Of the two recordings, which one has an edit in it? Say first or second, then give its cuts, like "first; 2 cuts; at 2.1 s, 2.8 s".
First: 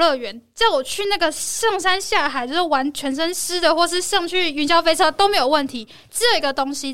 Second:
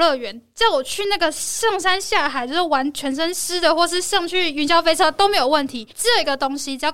second; 1 cut; at 5.9 s